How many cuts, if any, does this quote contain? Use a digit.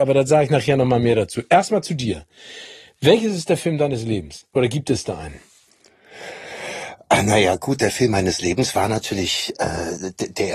0